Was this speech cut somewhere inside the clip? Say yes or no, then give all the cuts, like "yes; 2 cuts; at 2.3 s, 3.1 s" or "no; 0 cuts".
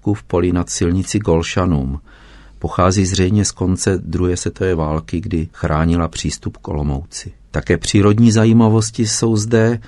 no; 0 cuts